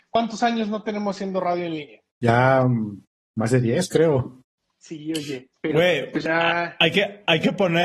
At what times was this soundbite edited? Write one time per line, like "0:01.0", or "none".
0:02.1